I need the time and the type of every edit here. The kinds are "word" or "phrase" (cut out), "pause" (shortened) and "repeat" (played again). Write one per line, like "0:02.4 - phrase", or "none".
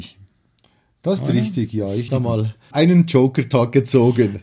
0:02.1 - word
0:02.7 - word